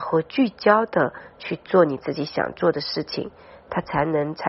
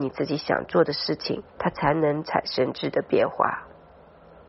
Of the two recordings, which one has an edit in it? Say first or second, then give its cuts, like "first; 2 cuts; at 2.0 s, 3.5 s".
second; 1 cut; at 1.5 s